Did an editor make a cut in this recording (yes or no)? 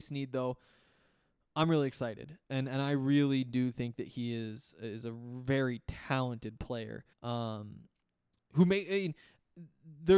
yes